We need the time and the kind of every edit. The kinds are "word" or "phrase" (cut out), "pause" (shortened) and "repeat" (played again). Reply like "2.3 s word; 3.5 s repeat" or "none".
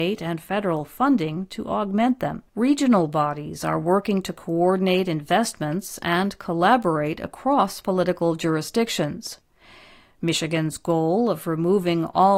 2.5 s pause

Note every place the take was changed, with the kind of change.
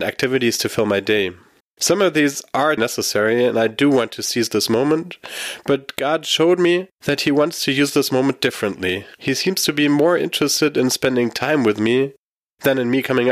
1.6 s pause; 2.8 s word; 6.9 s pause; 9.1 s pause

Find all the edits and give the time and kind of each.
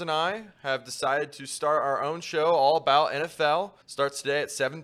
3.8 s pause

